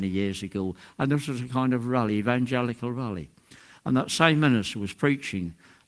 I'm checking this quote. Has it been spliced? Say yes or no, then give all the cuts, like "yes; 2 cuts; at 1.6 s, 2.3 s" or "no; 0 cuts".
no; 0 cuts